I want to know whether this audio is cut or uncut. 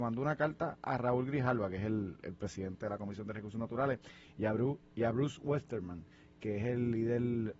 uncut